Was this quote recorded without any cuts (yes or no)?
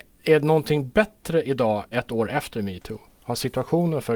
no